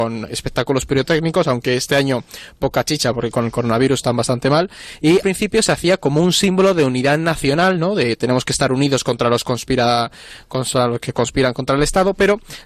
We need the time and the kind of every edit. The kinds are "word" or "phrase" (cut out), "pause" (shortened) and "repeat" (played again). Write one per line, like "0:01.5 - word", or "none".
0:05.2 - word